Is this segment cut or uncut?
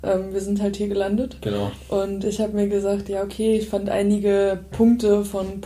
uncut